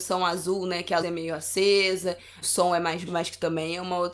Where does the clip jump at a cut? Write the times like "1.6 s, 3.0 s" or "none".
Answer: 1.0 s, 2.4 s, 3.1 s